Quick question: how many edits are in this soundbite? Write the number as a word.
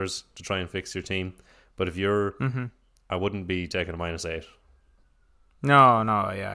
zero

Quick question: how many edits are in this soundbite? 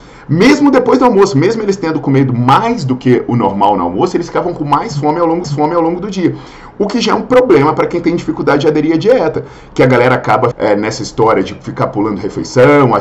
two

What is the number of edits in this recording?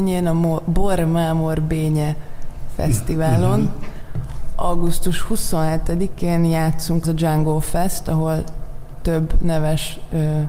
one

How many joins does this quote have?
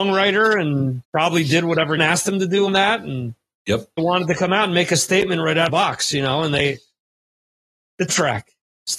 six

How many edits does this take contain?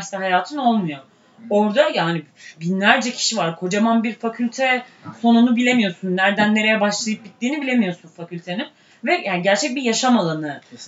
zero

